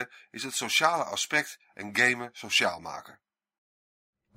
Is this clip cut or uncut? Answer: uncut